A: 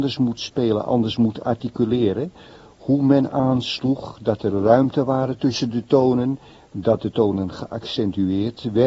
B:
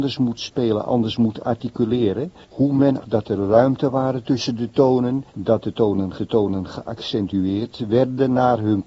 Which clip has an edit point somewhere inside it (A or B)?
B